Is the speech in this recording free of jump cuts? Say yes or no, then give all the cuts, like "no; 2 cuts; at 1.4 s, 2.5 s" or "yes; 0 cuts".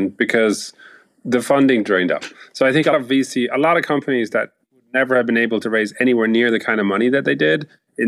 no; 2 cuts; at 2.9 s, 4.6 s